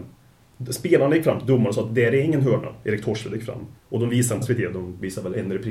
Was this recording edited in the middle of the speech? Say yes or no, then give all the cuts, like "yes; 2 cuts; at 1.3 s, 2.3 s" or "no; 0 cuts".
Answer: yes; 2 cuts; at 3.8 s, 4.4 s